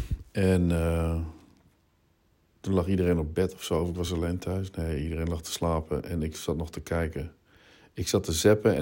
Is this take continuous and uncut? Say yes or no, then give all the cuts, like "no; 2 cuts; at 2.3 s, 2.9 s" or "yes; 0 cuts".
yes; 0 cuts